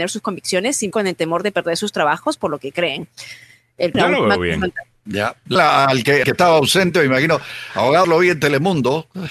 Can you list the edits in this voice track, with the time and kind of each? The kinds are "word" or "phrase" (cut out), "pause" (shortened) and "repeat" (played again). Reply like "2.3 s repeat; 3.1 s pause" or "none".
0.9 s word; 3.9 s word; 5.6 s word; 6.2 s word; 8.0 s word